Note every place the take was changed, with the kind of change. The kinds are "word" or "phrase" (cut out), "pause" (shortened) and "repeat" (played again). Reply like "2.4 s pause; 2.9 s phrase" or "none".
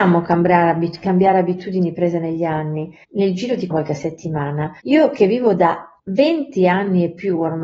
3.0 s pause; 3.7 s phrase; 4.8 s pause; 6.0 s pause